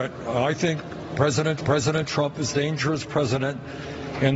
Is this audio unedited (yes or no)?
no